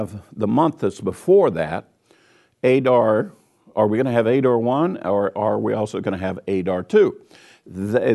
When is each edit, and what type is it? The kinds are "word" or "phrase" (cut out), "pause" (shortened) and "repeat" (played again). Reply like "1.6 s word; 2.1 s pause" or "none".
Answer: none